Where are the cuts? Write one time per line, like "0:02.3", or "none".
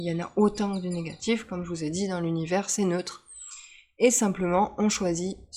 none